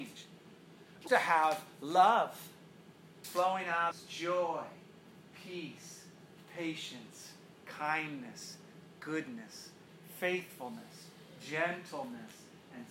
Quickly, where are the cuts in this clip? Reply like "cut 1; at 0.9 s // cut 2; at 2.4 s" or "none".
cut 1; at 1.1 s // cut 2; at 3.2 s // cut 3; at 3.9 s